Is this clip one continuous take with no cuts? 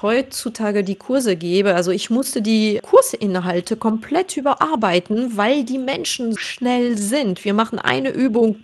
no; 2 cuts; at 2.8 s, 6.4 s

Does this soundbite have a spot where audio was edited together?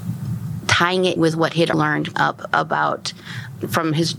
yes; 3 cuts; at 1.2 s, 1.7 s, 2.1 s

